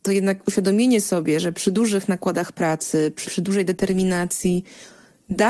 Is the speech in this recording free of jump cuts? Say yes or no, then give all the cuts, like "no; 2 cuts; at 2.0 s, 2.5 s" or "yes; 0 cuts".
no; 1 cut; at 3.2 s